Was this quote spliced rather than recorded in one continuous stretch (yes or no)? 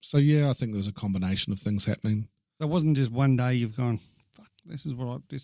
no